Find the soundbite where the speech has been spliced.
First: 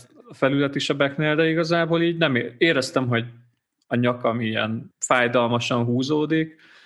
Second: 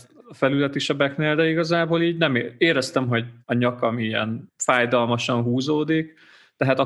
second; 1 cut; at 3.4 s

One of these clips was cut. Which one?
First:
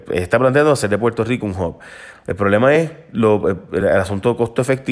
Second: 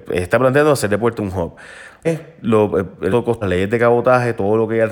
second; 4 cuts; at 1.2 s, 2.0 s, 3.1 s, 3.4 s

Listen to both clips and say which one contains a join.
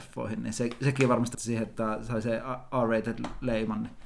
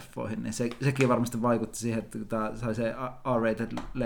first; 2 cuts; at 1.3 s, 1.7 s

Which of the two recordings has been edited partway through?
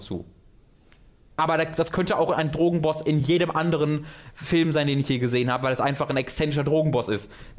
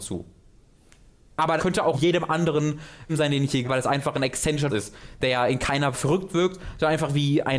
second; 6 cuts; at 1.6 s, 1.9 s, 3.1 s, 3.6 s, 4.7 s, 5.9 s

